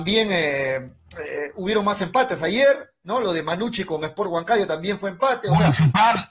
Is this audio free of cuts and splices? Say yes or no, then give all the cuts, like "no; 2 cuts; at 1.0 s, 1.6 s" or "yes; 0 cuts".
yes; 0 cuts